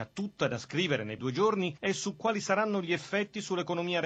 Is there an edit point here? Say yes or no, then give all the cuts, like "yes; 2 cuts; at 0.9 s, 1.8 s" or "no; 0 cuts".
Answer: yes; 1 cut; at 1.2 s